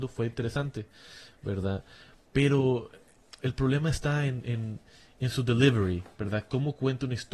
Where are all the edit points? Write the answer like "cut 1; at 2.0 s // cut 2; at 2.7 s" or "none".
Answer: none